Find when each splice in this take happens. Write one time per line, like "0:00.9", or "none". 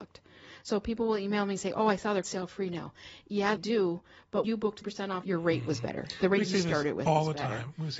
0:02.2
0:03.6
0:04.4
0:04.8
0:05.2